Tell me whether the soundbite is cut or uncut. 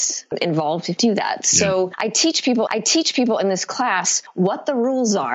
cut